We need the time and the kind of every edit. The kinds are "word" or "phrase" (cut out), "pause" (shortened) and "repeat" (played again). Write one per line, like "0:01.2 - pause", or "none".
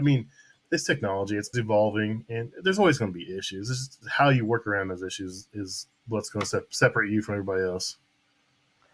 0:01.5 - word

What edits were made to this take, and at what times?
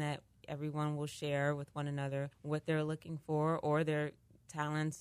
0:02.3 - pause

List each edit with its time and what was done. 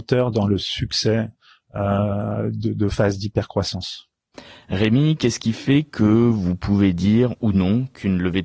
none

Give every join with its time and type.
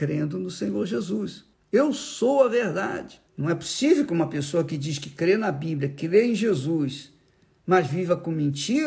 0:01.5 - pause
0:03.3 - pause

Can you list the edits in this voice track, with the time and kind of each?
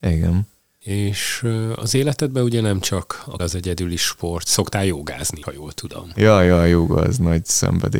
0:03.4 - word
0:05.4 - word

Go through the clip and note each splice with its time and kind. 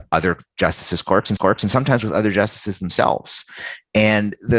0:01.4 - repeat

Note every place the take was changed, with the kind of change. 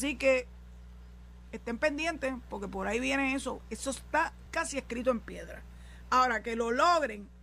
0:04.5 - word

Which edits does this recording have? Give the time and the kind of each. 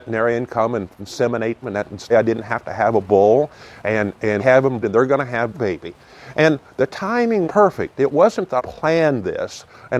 0:01.0 - word
0:01.6 - word
0:02.1 - word
0:04.4 - word
0:04.8 - word
0:05.5 - word
0:07.4 - word
0:08.6 - word

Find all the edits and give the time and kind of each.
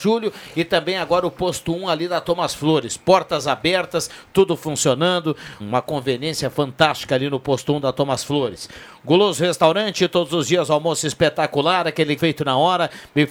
0:05.6 - word
0:12.2 - word

